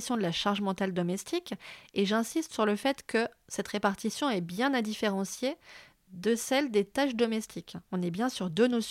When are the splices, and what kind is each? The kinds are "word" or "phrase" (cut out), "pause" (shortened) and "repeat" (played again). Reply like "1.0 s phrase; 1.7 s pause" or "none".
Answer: none

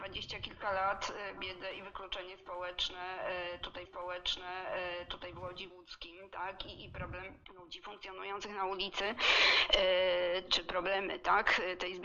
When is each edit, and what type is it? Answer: 1.4 s word; 3.8 s repeat; 5.7 s word; 7.4 s pause; 10.5 s word

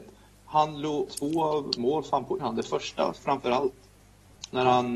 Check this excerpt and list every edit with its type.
1.1 s word; 1.8 s word; 2.4 s word

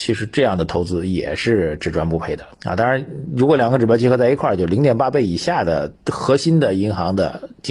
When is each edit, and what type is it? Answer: 2.5 s pause; 6.0 s pause

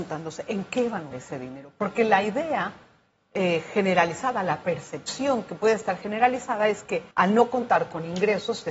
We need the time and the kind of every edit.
1.1 s word; 7.1 s pause

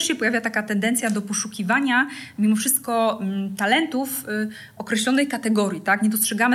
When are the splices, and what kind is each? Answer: none

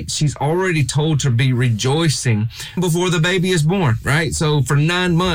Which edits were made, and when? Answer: 2.8 s word

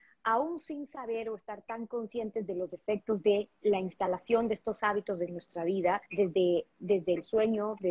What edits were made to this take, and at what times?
3.5 s pause; 6.1 s pause

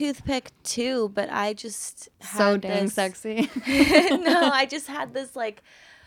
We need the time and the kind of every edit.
2.1 s pause

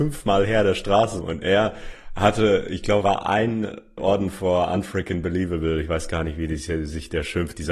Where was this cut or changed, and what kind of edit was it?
1.2 s word; 3.0 s word; 4.0 s word

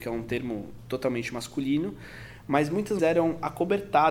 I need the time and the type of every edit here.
3.0 s word

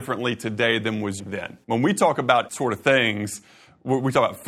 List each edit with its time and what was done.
1.2 s phrase; 1.6 s pause; 2.5 s phrase

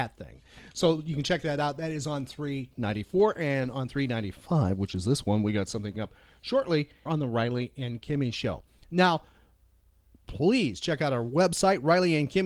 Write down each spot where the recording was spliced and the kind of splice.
6.0 s word; 7.1 s word

